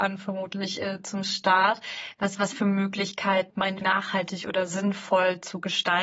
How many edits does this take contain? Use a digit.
3